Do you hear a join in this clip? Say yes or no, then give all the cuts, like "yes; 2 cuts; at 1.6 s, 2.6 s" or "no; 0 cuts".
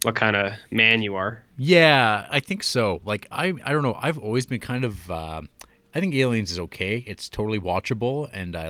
no; 0 cuts